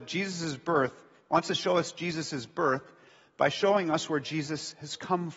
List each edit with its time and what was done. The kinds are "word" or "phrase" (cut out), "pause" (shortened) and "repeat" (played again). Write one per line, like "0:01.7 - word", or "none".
none